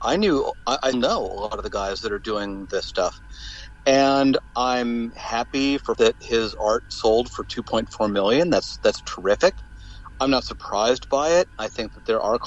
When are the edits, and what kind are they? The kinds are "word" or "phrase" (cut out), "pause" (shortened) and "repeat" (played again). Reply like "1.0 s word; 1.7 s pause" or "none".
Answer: 0.9 s word; 5.9 s word